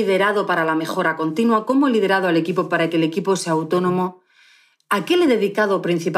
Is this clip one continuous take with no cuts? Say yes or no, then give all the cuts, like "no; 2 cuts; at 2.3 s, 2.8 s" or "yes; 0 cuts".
yes; 0 cuts